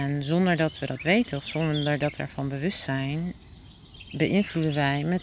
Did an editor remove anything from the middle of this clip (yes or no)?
yes